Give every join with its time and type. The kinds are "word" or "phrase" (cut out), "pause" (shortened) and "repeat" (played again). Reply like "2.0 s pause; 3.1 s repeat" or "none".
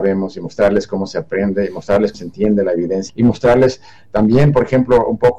2.1 s word; 3.1 s word